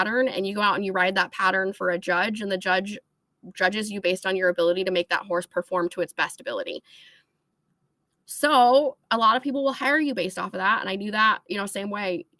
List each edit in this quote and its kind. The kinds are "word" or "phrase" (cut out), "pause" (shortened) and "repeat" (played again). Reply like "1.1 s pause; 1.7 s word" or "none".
none